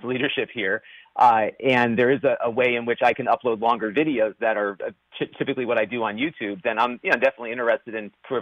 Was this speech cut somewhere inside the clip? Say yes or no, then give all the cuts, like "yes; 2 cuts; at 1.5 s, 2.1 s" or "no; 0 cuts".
no; 0 cuts